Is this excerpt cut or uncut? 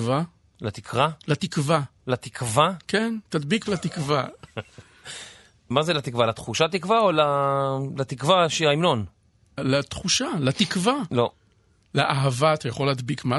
cut